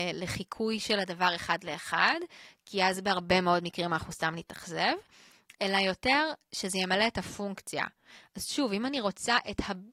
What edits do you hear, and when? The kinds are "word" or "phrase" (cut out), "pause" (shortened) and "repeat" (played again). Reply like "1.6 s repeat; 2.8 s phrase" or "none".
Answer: none